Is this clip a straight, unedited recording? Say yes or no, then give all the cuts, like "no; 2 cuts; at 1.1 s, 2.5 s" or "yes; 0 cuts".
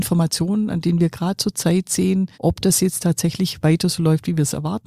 no; 1 cut; at 2.3 s